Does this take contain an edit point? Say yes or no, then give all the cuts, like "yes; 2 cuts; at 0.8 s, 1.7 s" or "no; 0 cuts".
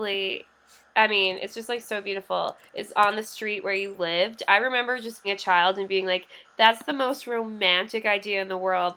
yes; 2 cuts; at 2.7 s, 5.2 s